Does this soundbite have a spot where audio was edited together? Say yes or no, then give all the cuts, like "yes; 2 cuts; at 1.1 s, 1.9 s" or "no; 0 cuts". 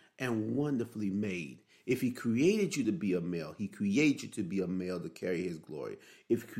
no; 0 cuts